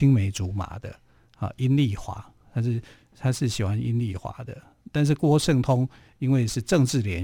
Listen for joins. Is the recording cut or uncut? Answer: uncut